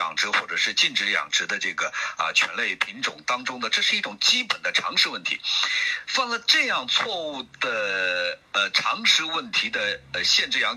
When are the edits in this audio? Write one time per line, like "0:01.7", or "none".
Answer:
none

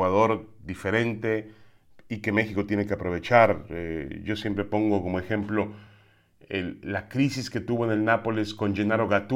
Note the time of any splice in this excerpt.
none

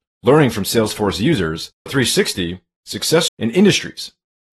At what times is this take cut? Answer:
0:01.9
0:03.3

